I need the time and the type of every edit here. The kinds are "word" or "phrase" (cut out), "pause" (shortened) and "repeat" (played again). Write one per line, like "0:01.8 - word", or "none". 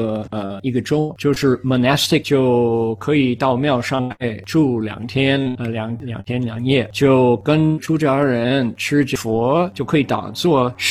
0:02.2 - word